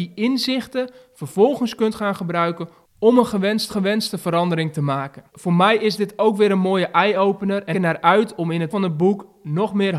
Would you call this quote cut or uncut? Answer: cut